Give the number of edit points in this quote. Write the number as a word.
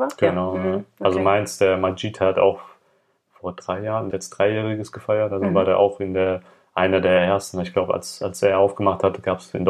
one